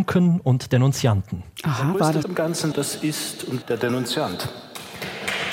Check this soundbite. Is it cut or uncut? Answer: cut